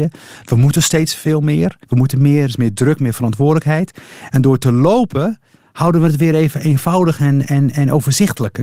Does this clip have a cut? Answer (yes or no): yes